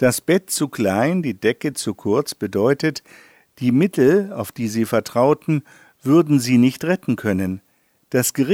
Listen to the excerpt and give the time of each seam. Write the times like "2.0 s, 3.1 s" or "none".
none